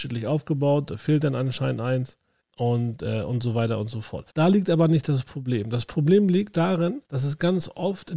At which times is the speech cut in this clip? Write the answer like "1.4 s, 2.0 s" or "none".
2.4 s, 4.3 s, 7.1 s